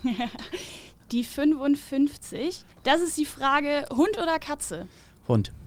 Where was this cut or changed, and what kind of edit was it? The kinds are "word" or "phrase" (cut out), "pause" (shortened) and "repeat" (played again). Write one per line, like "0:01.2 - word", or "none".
0:02.7 - pause